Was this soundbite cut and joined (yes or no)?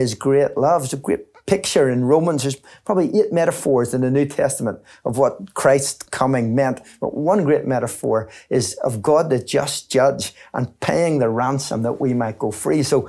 no